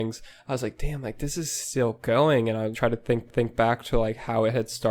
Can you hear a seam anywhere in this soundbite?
yes; 2 cuts; at 2.7 s, 3.3 s

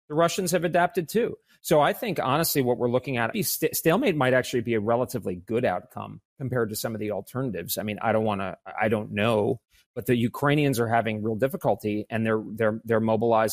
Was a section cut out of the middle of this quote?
yes; 2 cuts; at 3.3 s, 6.3 s

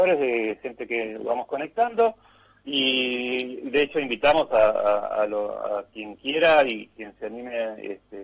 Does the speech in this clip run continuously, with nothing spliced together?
yes; 0 cuts

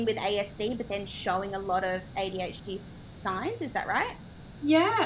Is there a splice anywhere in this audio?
no; 0 cuts

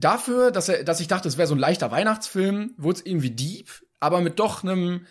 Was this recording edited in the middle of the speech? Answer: no; 0 cuts

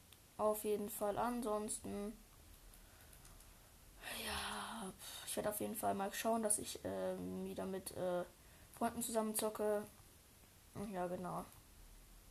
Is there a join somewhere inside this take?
no; 0 cuts

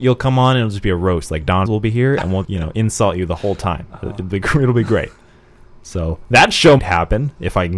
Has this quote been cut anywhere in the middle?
yes; 3 cuts; at 1.7 s, 2.4 s, 6.8 s

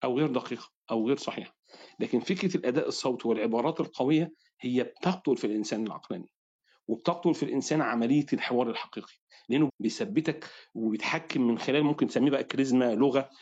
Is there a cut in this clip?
yes; 1 cut; at 9.7 s

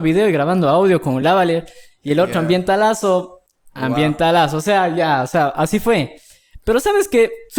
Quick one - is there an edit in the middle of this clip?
no; 0 cuts

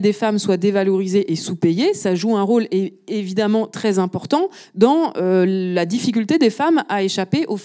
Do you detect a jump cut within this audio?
no; 0 cuts

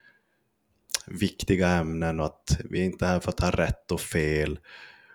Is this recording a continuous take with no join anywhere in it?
yes; 0 cuts

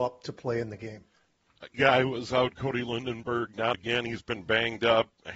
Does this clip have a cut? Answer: yes; 2 cuts; at 1.7 s, 3.7 s

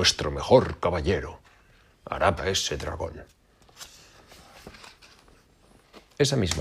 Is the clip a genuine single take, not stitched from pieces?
no; 1 cut; at 2.4 s

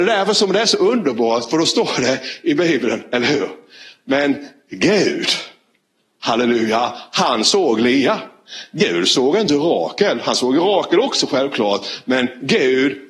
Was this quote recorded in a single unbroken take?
yes; 0 cuts

